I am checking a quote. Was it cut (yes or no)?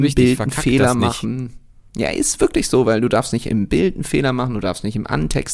no